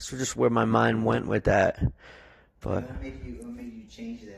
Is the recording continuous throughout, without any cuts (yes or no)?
yes